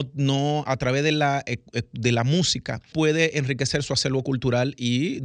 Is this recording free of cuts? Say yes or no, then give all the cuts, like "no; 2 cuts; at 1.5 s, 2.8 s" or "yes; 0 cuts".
no; 1 cut; at 2.9 s